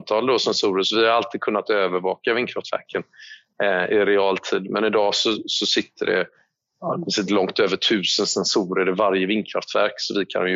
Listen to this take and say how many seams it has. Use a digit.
0